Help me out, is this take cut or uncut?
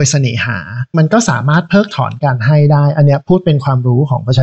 cut